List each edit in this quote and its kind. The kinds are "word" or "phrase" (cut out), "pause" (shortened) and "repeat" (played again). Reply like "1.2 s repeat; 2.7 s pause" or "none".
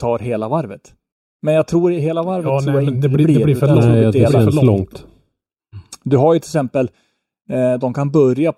1.1 s pause